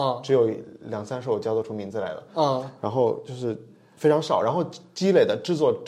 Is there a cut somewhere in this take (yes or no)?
no